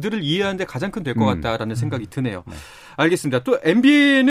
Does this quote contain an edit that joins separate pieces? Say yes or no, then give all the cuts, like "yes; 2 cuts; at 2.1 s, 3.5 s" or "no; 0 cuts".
yes; 1 cut; at 1.0 s